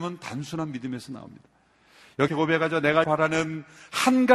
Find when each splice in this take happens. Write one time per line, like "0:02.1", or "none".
0:02.3
0:03.0

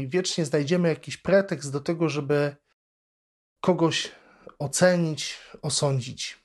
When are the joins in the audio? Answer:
none

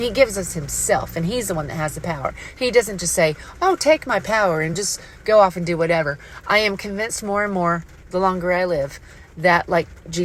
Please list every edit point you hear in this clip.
none

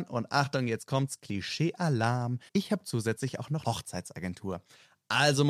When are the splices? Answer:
0:02.5
0:03.6

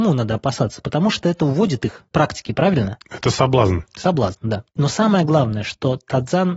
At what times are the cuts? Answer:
0:02.1
0:04.7

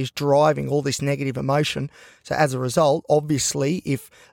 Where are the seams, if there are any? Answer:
none

